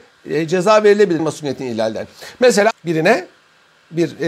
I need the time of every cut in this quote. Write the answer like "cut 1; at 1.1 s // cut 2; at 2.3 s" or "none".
cut 1; at 1.2 s // cut 2; at 2.7 s

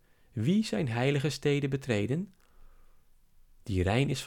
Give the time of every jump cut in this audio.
none

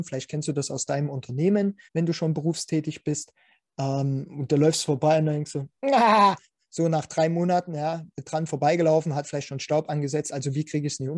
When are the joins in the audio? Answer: cut 1; at 1.9 s

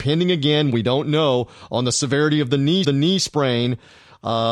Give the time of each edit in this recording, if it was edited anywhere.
cut 1; at 2.8 s

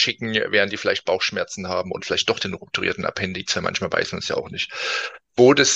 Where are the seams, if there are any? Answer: none

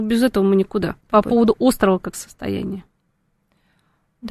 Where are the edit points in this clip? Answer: cut 1; at 1.0 s // cut 2; at 2.1 s

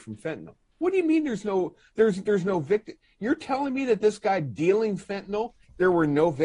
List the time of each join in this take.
none

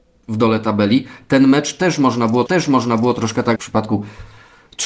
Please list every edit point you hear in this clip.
cut 1; at 2.5 s // cut 2; at 3.6 s

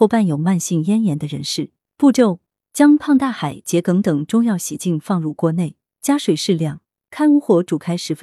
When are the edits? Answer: none

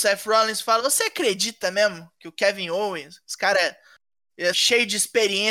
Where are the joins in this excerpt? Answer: cut 1; at 4.5 s

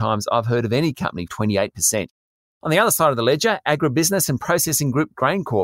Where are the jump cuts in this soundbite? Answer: cut 1; at 1.3 s

